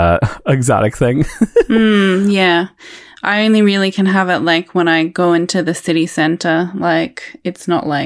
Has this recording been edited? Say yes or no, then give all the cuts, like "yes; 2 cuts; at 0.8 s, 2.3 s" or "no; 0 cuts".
no; 0 cuts